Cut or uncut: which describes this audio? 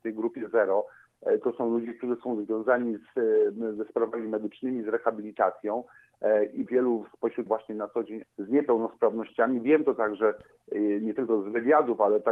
cut